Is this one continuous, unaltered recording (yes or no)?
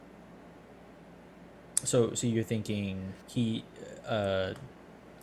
no